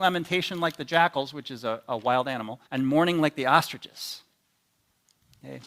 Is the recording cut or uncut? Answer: cut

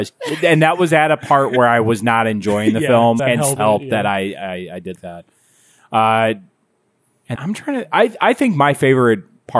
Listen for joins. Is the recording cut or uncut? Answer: cut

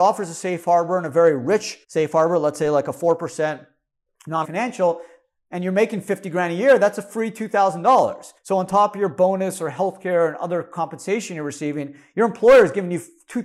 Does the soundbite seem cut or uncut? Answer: cut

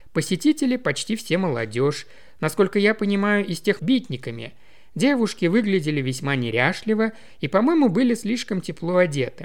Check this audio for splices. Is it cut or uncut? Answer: cut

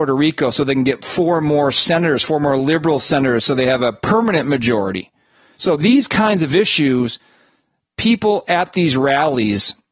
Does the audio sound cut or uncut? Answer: uncut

